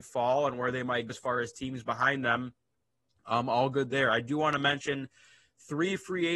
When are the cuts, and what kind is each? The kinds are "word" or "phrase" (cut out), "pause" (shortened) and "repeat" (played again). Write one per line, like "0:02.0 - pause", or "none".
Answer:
0:01.1 - word